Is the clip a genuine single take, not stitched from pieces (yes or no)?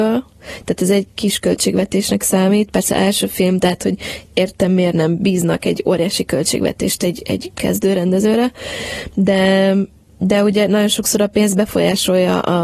yes